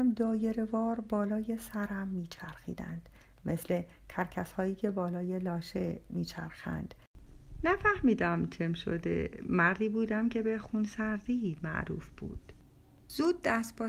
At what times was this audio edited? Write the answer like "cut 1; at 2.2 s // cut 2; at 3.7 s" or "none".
none